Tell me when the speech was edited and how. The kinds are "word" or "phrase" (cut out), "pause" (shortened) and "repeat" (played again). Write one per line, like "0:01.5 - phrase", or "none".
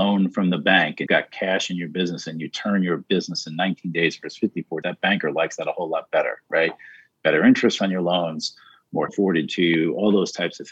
0:01.1 - word
0:04.8 - word
0:07.8 - word
0:09.1 - word

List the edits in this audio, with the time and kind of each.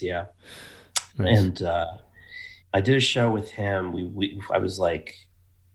0:02.6 - pause

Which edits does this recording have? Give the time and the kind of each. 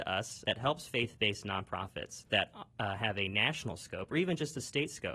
0:02.3 - pause

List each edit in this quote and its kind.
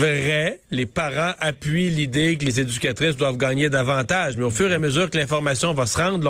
none

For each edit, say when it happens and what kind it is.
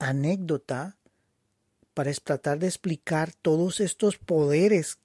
none

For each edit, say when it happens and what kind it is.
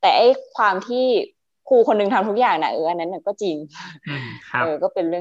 none

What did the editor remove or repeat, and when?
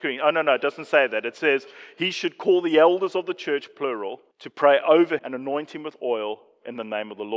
0:04.3 - pause
0:05.2 - word

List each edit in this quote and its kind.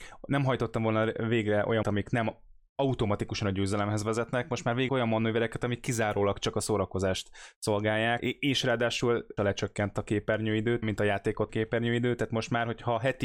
0:01.8 - word
0:04.9 - word
0:08.2 - word
0:09.4 - word
0:10.8 - word
0:11.5 - word

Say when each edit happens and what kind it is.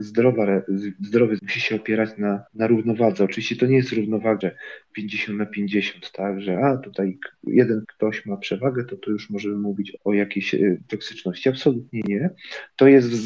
0:01.4 - phrase
0:02.5 - pause
0:04.4 - phrase
0:07.8 - word
0:10.0 - word

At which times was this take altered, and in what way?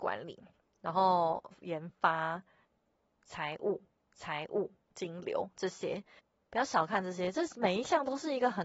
0:04.0 - repeat
0:06.2 - pause

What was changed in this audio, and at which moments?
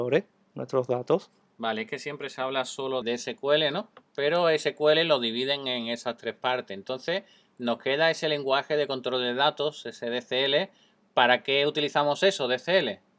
0:03.0 - word

